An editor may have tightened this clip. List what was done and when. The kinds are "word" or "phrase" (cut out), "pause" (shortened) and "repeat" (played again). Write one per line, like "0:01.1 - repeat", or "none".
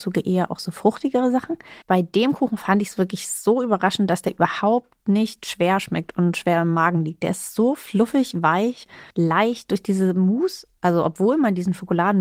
0:01.8 - pause
0:05.0 - pause
0:09.1 - pause